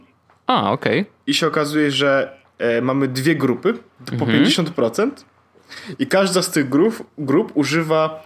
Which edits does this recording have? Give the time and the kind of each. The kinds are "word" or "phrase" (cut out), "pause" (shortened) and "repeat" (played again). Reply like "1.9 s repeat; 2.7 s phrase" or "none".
3.9 s pause